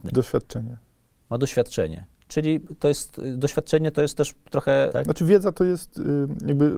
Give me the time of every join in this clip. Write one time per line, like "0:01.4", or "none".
0:04.9